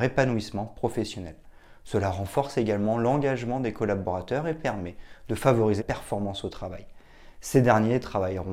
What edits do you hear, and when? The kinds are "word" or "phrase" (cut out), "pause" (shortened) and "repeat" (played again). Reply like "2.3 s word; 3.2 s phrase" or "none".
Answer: 5.8 s word